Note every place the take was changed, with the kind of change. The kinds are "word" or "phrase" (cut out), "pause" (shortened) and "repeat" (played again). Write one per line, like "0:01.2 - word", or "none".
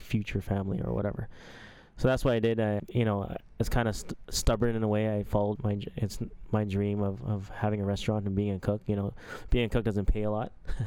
0:02.8 - word
0:05.6 - word
0:07.2 - word